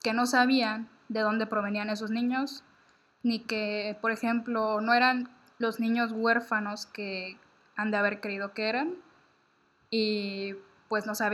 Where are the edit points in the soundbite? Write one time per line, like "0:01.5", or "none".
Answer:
none